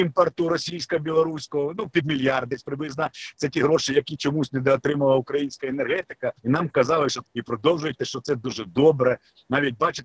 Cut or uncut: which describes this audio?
cut